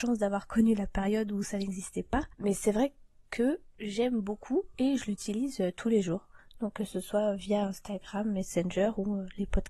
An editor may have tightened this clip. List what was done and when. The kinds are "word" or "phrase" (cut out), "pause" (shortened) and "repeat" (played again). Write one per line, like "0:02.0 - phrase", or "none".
0:02.3 - pause